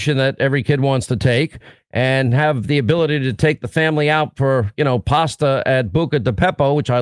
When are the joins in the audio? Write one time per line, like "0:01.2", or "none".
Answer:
none